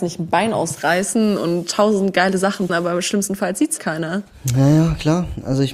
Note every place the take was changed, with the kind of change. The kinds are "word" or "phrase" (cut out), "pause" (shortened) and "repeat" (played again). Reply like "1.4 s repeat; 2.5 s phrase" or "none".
2.7 s word; 3.8 s word